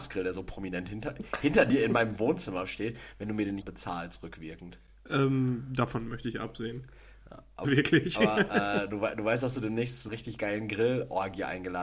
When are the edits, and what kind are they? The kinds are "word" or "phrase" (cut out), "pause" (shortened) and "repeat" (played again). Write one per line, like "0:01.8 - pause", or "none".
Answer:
0:03.6 - word
0:07.6 - word
0:10.1 - word